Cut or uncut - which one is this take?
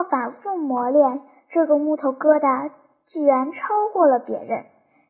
uncut